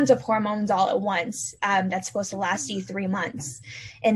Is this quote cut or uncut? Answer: uncut